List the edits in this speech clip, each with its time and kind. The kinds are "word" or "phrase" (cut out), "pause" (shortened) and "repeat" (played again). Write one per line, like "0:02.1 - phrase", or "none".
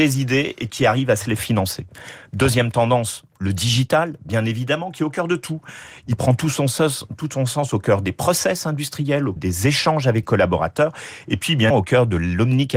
0:01.4 - word
0:09.4 - word
0:10.2 - word
0:11.7 - word